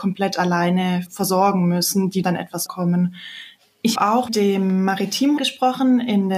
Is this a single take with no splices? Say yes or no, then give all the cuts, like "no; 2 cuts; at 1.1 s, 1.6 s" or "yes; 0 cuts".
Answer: no; 6 cuts; at 1.1 s, 2.2 s, 2.7 s, 4.0 s, 4.3 s, 5.4 s